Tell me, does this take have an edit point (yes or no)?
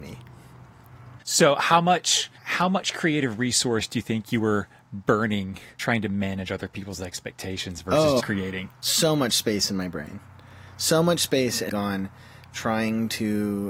yes